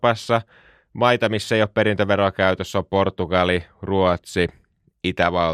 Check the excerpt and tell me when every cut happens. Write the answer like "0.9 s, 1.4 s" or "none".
none